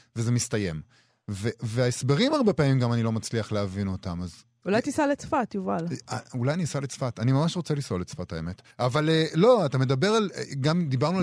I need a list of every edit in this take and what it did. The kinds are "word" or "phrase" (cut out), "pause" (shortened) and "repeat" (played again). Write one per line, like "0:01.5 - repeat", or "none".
0:08.7 - pause

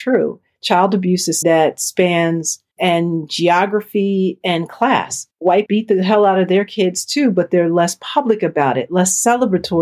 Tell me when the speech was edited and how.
0:01.4 - word
0:02.7 - word
0:05.7 - word

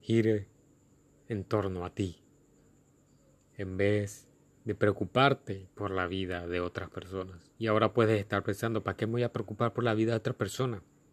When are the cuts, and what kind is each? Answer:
0:04.5 - pause
0:05.7 - pause
0:07.6 - pause

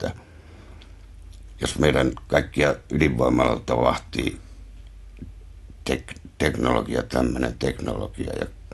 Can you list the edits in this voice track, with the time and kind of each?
none

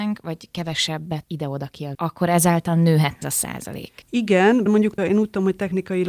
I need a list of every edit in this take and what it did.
0:01.2 - word
0:01.9 - word
0:03.2 - word
0:04.7 - word
0:05.0 - word

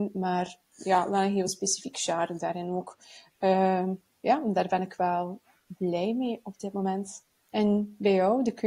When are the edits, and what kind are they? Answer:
none

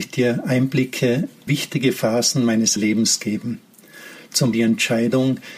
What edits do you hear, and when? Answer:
0:01.5 - word
0:02.8 - word
0:04.5 - word

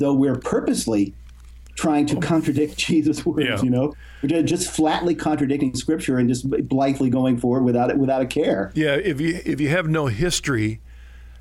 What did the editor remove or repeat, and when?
none

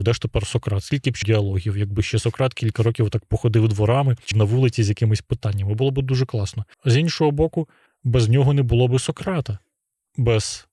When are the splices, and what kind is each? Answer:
0:01.2 - word
0:04.3 - phrase
0:06.7 - pause
0:07.9 - pause

